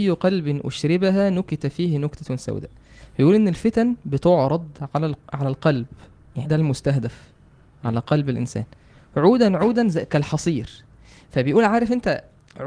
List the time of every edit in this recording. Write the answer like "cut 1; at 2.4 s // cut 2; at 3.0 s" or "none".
cut 1; at 6.4 s